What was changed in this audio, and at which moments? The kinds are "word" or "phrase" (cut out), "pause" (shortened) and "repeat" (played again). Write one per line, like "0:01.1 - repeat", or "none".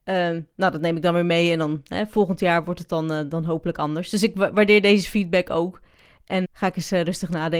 0:06.4 - word